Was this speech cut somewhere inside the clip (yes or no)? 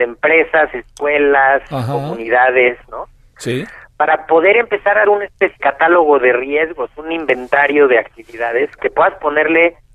yes